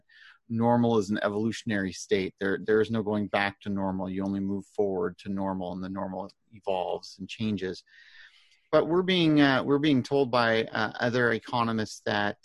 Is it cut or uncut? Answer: uncut